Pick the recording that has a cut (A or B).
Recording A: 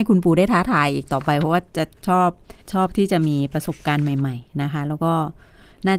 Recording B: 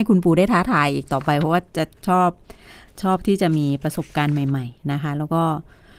A